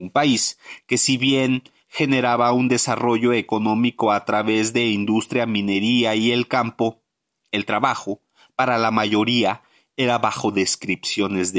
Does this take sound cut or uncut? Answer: uncut